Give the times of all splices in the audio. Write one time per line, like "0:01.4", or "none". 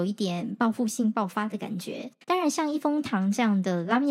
0:02.2